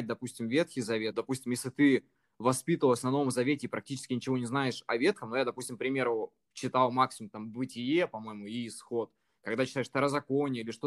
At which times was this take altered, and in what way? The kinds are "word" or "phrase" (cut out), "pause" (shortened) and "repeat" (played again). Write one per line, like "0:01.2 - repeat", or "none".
none